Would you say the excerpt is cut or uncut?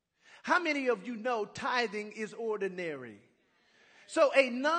uncut